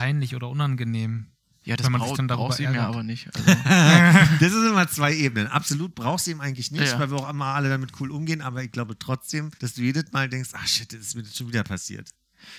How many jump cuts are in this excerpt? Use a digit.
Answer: 1